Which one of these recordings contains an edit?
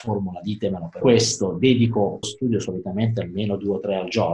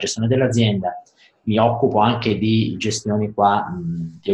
first; 2 cuts; at 1.0 s, 2.2 s

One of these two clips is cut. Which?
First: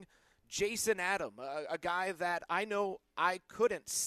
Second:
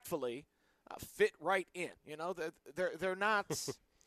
second; 1 cut; at 2.0 s

